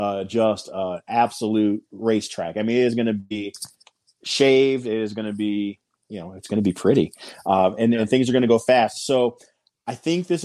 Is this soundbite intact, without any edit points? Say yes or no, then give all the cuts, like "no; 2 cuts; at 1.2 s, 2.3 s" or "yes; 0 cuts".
yes; 0 cuts